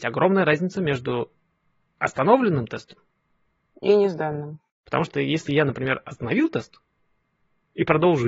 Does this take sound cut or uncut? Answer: uncut